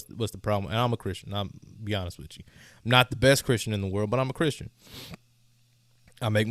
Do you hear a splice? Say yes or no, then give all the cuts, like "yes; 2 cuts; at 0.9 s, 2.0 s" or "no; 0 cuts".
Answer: no; 0 cuts